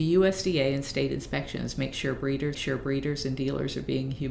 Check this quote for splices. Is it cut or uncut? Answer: cut